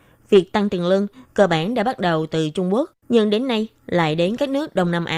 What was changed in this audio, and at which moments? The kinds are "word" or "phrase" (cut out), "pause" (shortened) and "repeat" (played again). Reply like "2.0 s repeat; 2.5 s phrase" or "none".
3.0 s pause